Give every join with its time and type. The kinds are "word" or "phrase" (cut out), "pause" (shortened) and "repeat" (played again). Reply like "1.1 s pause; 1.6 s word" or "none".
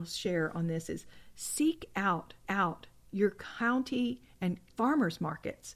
2.4 s repeat; 4.7 s pause